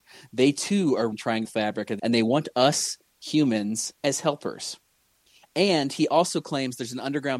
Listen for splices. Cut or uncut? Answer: cut